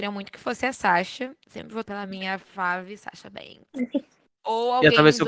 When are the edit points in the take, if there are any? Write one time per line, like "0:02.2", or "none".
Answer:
0:01.8